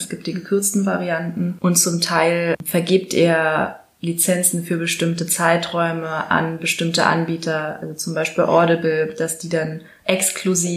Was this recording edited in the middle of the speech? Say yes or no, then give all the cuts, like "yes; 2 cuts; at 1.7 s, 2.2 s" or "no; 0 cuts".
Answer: no; 0 cuts